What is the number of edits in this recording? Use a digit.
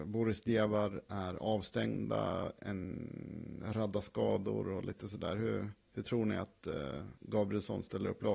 1